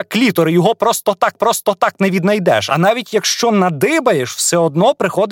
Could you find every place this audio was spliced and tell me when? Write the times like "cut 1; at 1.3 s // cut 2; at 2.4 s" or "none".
cut 1; at 1.4 s